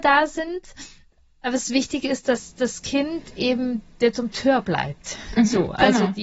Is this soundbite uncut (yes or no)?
yes